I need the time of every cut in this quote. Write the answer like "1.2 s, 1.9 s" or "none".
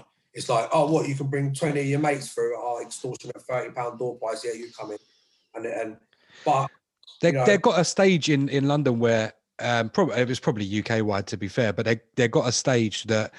none